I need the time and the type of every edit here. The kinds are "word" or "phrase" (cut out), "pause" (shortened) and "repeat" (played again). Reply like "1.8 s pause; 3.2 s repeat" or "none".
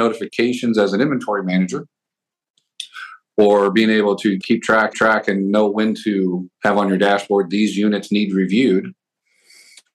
4.4 s word; 4.9 s repeat; 6.5 s pause

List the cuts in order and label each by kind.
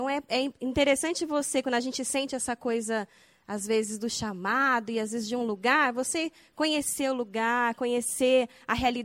none

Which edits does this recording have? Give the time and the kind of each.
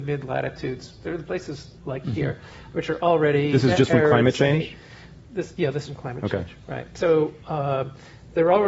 1.8 s pause; 2.7 s word; 5.9 s phrase

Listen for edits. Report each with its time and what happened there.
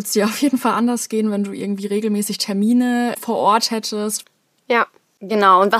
none

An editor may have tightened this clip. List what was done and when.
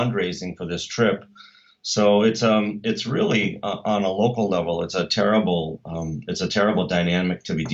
none

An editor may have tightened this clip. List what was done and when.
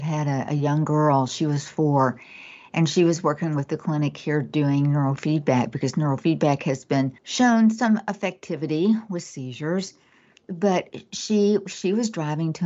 7.2 s pause

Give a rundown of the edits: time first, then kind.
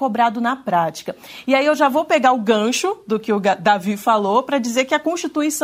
none

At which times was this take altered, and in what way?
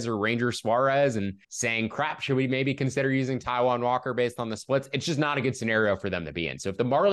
1.4 s pause

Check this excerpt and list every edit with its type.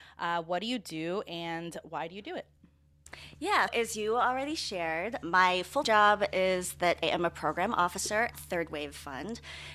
3.7 s word; 5.2 s word; 5.8 s word; 7.0 s word; 8.3 s word

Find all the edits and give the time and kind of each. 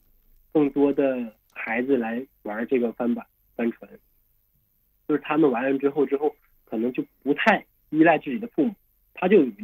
1.4 s pause

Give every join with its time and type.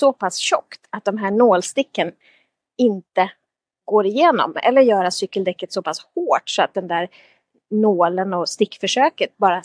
none

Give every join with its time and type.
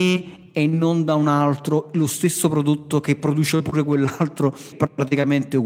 4.7 s phrase

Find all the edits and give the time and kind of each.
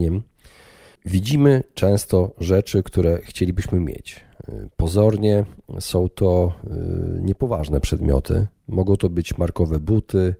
8.6 s pause

